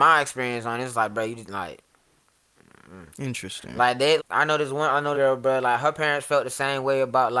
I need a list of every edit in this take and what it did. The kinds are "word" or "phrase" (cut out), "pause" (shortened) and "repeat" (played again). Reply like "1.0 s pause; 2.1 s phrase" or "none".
3.1 s pause; 4.2 s word; 5.1 s phrase